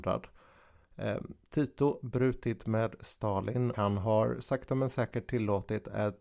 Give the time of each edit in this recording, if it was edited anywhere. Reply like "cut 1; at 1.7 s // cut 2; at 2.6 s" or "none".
cut 1; at 2.0 s // cut 2; at 3.7 s